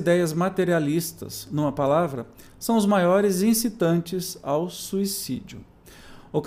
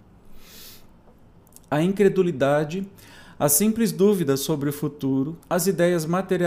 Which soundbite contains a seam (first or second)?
second